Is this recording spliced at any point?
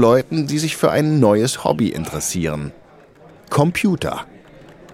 no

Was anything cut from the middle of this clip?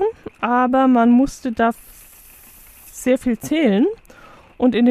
no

